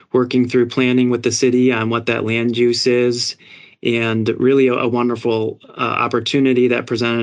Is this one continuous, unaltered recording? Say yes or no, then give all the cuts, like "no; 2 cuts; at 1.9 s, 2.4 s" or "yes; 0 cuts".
yes; 0 cuts